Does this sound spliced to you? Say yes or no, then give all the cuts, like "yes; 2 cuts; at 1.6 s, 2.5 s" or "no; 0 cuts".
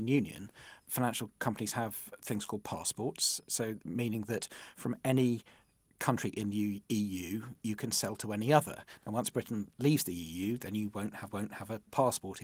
yes; 1 cut; at 11.3 s